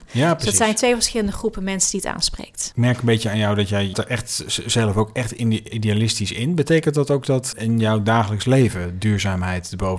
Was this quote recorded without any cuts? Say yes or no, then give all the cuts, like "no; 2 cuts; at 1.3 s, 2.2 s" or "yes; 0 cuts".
no; 3 cuts; at 3.9 s, 5.7 s, 7.5 s